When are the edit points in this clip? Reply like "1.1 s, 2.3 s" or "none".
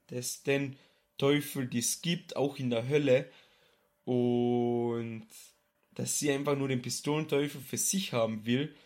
none